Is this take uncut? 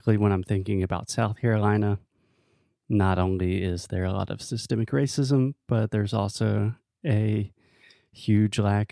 yes; 0 cuts

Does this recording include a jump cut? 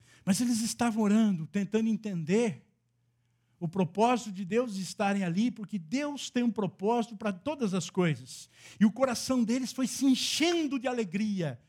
no; 0 cuts

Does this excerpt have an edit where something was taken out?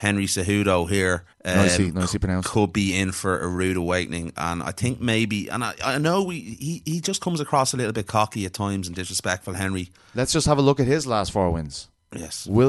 yes; 1 cut; at 1.3 s

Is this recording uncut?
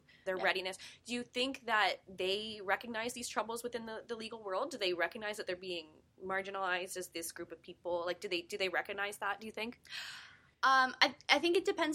yes; 0 cuts

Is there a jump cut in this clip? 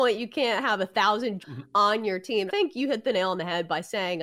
yes; 2 cuts; at 1.4 s, 2.5 s

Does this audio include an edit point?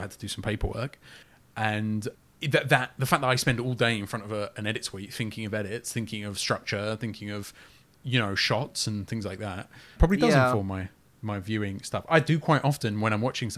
no; 0 cuts

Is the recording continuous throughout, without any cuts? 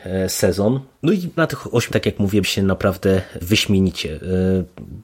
no; 4 cuts; at 1.4 s, 1.9 s, 2.4 s, 3.4 s

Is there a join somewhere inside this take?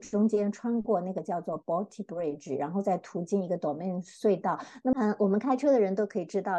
no; 0 cuts

